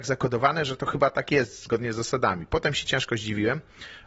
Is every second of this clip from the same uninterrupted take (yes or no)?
yes